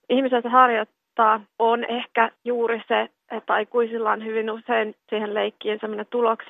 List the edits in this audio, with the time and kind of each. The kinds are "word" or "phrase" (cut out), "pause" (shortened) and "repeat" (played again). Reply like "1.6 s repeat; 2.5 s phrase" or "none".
1.5 s pause; 2.4 s pause; 5.0 s pause